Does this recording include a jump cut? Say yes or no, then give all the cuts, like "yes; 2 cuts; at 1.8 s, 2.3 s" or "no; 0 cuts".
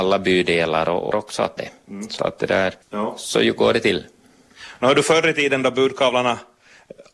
yes; 4 cuts; at 1.1 s, 1.6 s, 2.2 s, 2.8 s